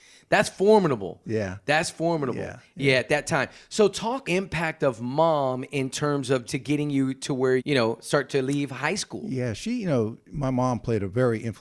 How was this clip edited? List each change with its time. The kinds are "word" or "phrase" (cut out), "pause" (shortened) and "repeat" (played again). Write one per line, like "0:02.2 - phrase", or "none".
0:04.2 - phrase
0:06.5 - phrase
0:07.6 - word

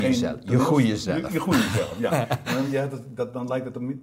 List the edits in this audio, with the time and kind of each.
none

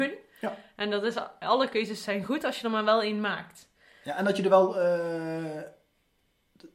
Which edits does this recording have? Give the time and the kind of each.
none

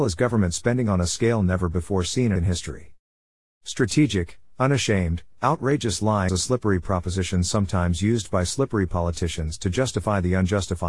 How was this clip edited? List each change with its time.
0:02.4 - word
0:06.3 - word

